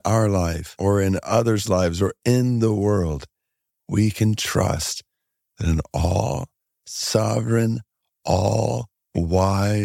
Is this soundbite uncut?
yes; 0 cuts

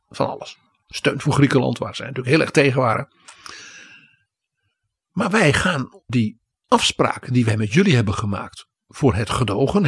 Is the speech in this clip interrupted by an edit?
no; 0 cuts

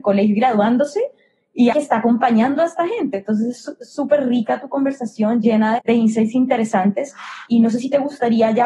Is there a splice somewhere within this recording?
yes; 2 cuts; at 1.7 s, 5.8 s

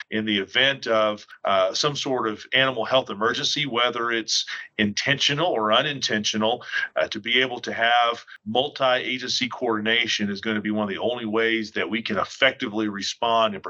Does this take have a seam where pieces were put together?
no; 0 cuts

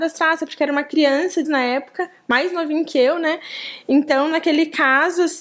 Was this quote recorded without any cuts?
no; 1 cut; at 1.4 s

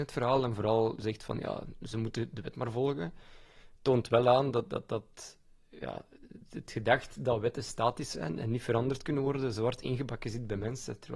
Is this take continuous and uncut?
yes; 0 cuts

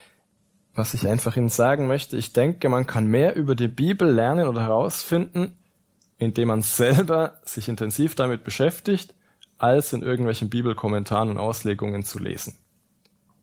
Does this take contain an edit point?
no; 0 cuts

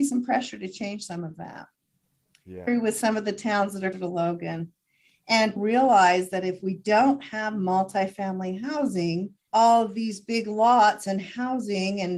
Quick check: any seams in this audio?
yes; 4 cuts; at 2.7 s, 3.9 s, 5.6 s, 9.5 s

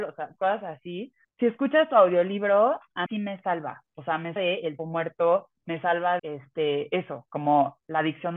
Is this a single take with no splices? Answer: no; 6 cuts; at 1.2 s, 3.1 s, 4.4 s, 4.8 s, 5.6 s, 6.2 s

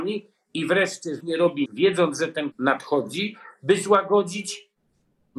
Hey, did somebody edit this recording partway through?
yes; 3 cuts; at 1.2 s, 1.7 s, 2.5 s

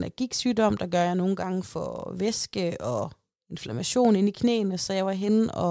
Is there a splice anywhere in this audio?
no; 0 cuts

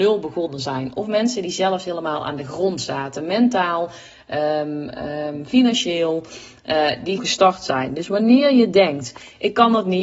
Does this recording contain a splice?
yes; 1 cut; at 7.2 s

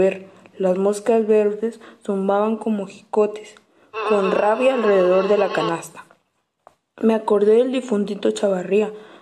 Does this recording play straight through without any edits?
yes; 0 cuts

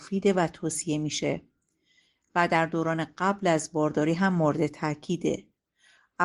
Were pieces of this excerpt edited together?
no; 0 cuts

